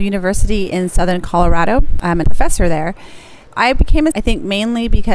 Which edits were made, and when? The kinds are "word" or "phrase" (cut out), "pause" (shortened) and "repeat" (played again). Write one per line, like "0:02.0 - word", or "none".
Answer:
0:02.2 - word
0:04.1 - word